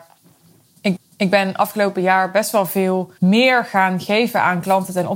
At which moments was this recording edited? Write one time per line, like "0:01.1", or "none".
0:01.0
0:03.2